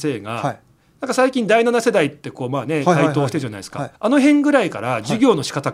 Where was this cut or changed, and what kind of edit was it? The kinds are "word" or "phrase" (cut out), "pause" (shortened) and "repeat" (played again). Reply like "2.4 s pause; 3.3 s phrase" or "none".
3.9 s pause